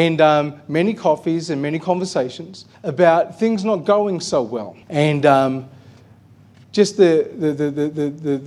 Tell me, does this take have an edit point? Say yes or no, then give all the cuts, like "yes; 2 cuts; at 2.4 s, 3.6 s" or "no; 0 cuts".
yes; 2 cuts; at 2.7 s, 4.8 s